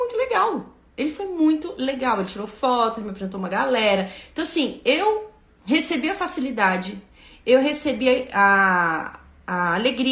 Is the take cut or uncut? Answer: uncut